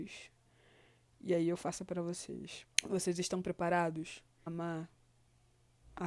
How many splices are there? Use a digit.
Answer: 3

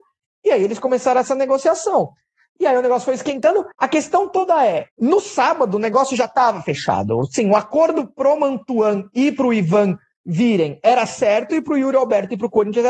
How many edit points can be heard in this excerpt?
2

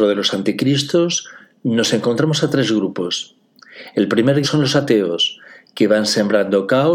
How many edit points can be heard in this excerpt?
1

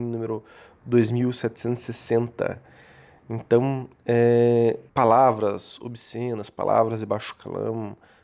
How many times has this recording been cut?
1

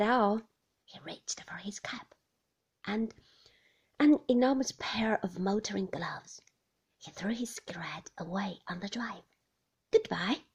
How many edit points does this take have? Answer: 0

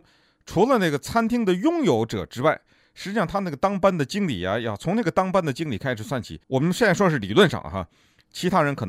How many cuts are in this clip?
1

